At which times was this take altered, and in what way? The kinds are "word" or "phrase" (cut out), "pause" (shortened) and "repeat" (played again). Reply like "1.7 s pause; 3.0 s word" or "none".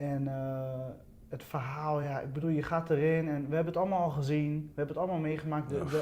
none